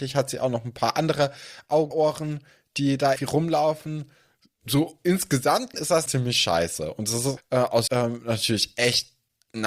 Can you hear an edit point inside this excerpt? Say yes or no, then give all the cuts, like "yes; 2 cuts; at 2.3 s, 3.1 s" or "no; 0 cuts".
yes; 6 cuts; at 1.9 s, 3.2 s, 5.7 s, 6.1 s, 7.4 s, 7.9 s